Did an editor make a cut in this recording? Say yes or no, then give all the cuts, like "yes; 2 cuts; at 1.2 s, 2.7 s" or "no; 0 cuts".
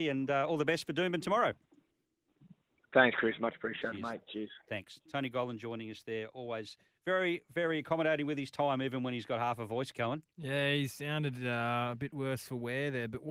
no; 0 cuts